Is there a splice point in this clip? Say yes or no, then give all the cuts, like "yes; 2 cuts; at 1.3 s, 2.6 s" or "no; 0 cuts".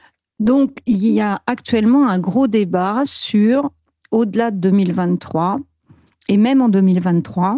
no; 0 cuts